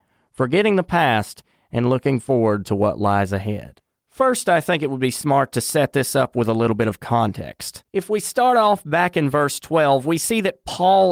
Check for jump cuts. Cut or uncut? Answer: uncut